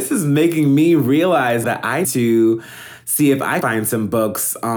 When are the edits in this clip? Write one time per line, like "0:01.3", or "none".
0:01.6
0:02.0
0:03.6